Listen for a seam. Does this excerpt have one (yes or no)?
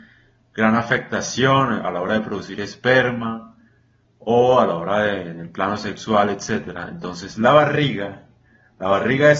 no